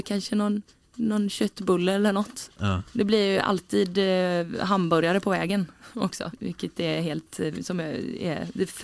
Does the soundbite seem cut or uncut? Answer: uncut